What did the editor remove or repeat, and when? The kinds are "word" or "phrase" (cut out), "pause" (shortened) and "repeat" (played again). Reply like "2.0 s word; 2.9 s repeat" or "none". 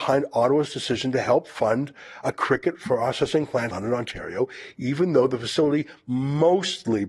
3.7 s word